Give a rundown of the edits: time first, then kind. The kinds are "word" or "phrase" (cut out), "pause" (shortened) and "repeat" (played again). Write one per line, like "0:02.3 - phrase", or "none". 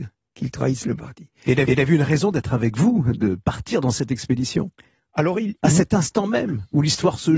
0:01.7 - repeat